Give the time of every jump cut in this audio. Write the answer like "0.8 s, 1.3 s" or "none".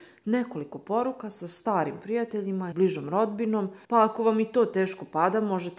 2.7 s, 3.8 s